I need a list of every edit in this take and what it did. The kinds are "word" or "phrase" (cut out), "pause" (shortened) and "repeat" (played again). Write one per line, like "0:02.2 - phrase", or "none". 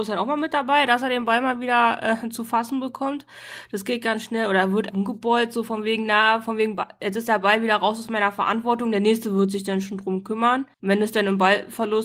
0:04.9 - word
0:10.7 - pause